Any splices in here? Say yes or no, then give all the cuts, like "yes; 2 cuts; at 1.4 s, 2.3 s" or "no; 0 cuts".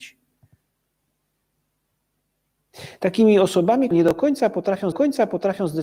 yes; 2 cuts; at 3.9 s, 4.9 s